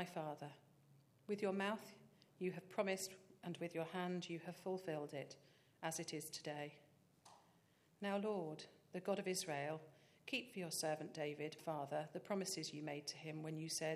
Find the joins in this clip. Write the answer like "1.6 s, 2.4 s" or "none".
11.6 s